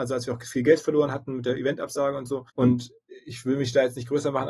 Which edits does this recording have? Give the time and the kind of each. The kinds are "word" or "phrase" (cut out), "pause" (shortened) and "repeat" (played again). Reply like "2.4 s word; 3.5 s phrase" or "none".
2.5 s pause; 3.2 s pause